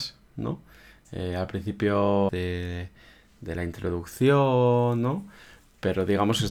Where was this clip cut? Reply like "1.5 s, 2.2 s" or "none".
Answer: 2.3 s